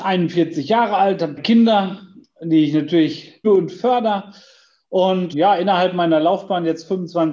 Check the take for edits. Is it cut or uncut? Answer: cut